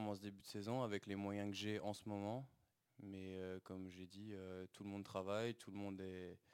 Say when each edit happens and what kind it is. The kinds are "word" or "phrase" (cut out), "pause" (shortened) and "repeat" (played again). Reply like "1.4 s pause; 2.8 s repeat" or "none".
none